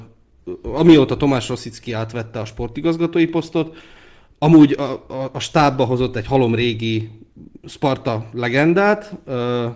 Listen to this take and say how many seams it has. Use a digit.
0